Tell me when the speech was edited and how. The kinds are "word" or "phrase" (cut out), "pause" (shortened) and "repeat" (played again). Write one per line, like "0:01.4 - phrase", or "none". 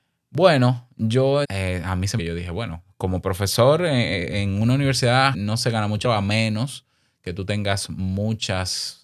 0:01.4 - word
0:02.2 - phrase
0:05.3 - word
0:06.0 - word